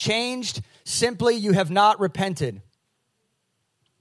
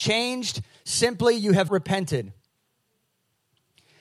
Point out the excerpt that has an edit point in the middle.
second; 1 cut; at 1.7 s

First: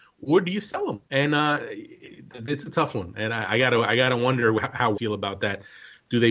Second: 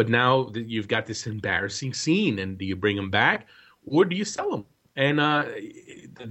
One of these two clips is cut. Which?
first; 2 cuts; at 1.1 s, 4.9 s

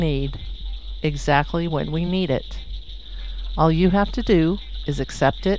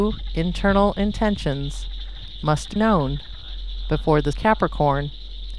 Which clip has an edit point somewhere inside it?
second; 2 cuts; at 2.8 s, 4.3 s

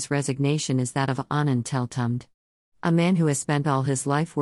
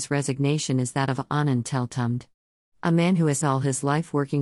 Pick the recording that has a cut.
second; 1 cut; at 3.4 s

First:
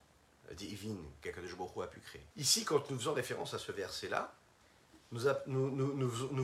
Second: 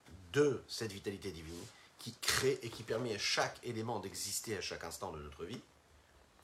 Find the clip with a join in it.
first; 1 cut; at 2.3 s

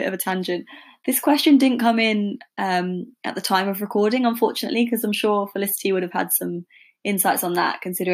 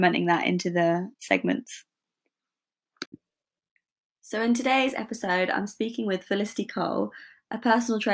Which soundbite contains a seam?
second; 1 cut; at 1.1 s

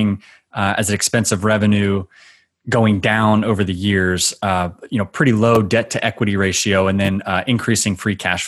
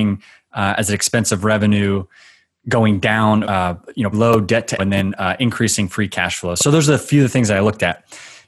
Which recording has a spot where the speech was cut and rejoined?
second; 3 cuts; at 3.4 s, 4.1 s, 4.8 s

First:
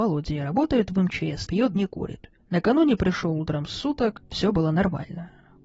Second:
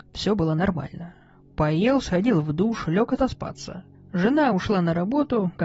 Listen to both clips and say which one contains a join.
first; 2 cuts; at 1.5 s, 1.8 s

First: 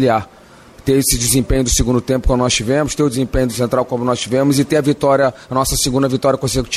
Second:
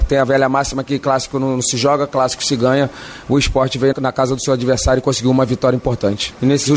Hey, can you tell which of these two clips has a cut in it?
second; 1 cut; at 3.9 s

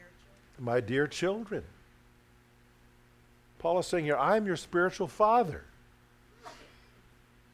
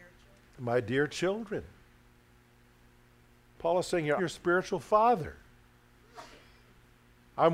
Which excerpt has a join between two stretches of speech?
second; 1 cut; at 4.2 s

